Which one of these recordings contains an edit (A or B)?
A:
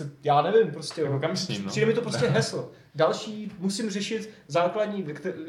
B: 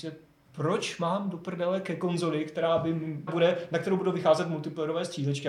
B